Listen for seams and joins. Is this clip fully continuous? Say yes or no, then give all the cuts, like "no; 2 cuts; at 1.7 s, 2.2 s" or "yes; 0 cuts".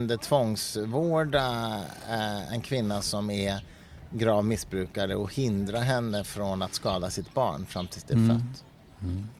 yes; 0 cuts